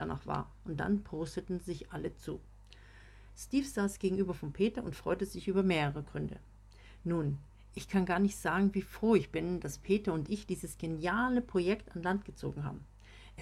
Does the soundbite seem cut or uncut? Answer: uncut